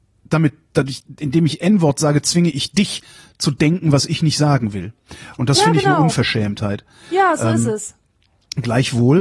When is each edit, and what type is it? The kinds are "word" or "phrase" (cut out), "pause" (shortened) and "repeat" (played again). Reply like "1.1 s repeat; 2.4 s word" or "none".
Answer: none

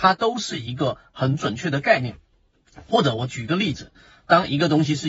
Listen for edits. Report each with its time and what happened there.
none

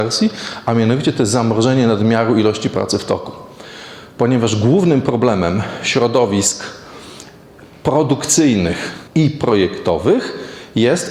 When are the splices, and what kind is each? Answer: 9.1 s pause

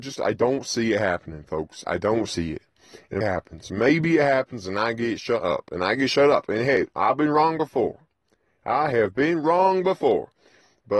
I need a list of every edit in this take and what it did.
3.2 s word

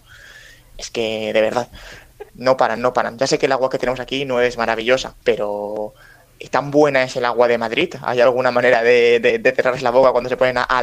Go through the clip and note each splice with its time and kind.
2.3 s pause; 5.2 s pause

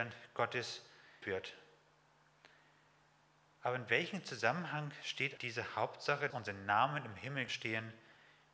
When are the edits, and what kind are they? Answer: 1.2 s word; 5.4 s word; 6.3 s word; 7.5 s word

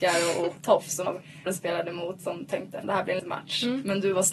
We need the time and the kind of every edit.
1.1 s word; 1.5 s word; 2.8 s word; 3.2 s word

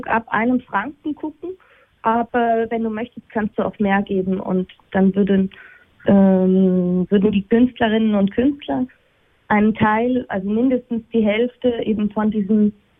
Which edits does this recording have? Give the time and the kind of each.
none

